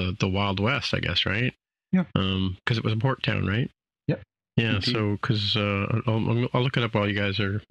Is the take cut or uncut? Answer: uncut